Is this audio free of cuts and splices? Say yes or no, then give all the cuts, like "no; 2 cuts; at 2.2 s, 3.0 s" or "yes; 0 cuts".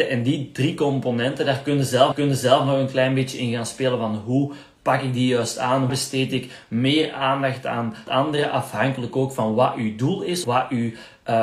no; 4 cuts; at 2.1 s, 5.9 s, 8.1 s, 10.4 s